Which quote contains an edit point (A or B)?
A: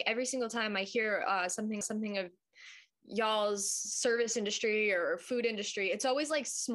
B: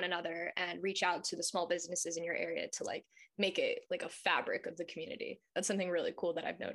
A